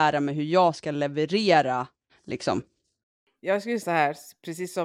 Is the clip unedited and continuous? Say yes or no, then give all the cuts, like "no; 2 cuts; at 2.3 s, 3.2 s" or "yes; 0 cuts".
no; 2 cuts; at 2.1 s, 3.8 s